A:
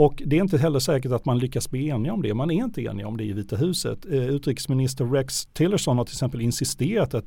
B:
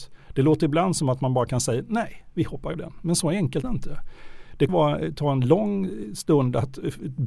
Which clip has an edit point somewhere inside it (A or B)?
B